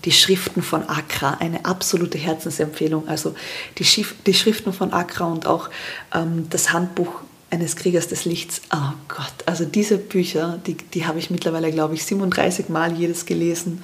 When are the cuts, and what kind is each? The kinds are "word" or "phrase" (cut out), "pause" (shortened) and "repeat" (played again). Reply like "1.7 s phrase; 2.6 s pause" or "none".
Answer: none